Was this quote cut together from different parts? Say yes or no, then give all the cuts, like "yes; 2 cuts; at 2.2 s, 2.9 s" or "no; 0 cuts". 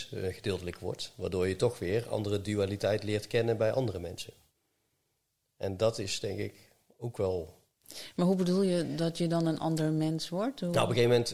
no; 0 cuts